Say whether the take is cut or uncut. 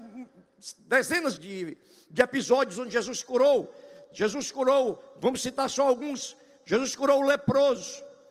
cut